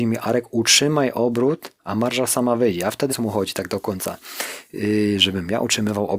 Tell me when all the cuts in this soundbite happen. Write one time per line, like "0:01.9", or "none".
0:01.8
0:03.1